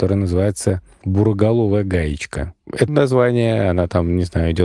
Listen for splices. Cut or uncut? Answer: cut